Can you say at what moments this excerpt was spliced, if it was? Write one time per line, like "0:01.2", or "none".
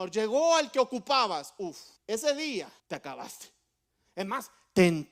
0:02.0
0:02.8